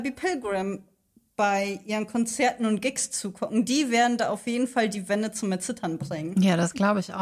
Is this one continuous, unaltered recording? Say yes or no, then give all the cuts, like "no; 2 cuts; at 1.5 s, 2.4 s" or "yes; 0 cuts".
yes; 0 cuts